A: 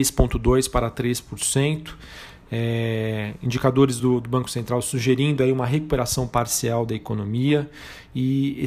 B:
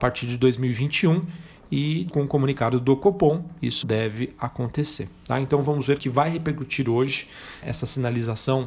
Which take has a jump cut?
B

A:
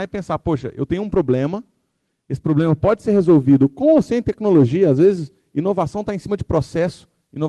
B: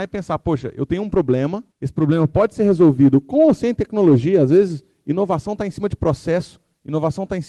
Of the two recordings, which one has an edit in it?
B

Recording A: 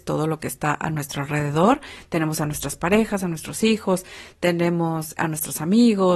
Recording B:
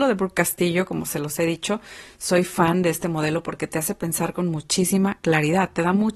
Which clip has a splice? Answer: A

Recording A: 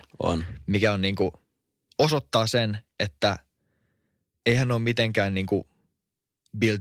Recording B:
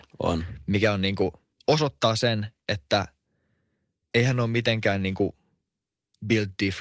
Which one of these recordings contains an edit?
B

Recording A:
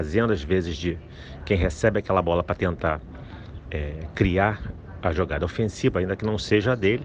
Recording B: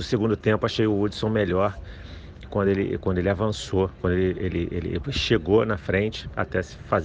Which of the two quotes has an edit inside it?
A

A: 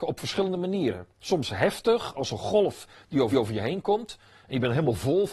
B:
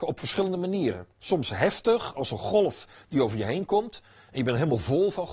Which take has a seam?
A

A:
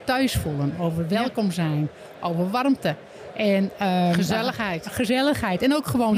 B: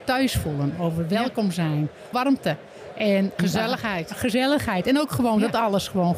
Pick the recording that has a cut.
B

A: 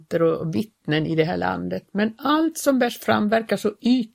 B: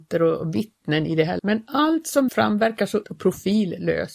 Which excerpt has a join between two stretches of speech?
B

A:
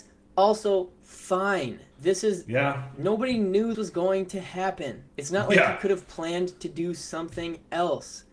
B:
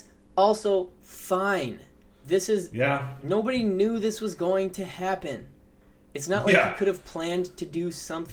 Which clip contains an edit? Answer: A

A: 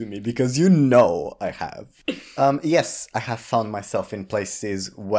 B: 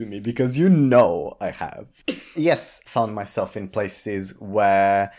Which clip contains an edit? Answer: B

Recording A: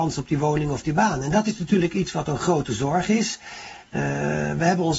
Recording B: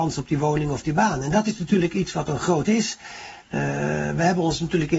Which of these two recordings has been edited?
B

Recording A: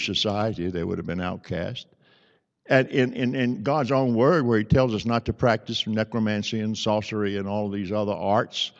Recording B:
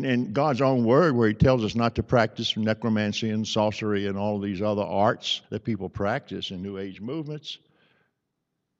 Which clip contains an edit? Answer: B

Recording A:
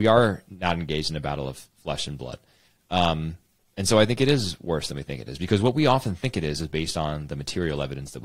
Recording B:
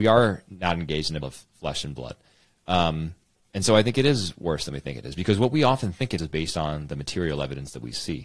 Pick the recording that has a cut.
B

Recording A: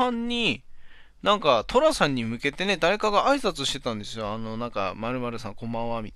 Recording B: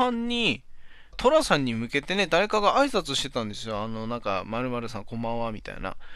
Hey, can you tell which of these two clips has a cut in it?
B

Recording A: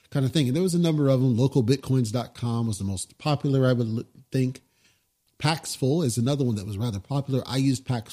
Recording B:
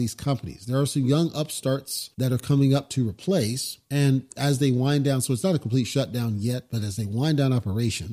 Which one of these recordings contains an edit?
B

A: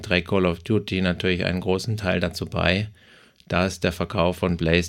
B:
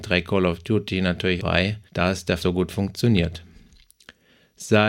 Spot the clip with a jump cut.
B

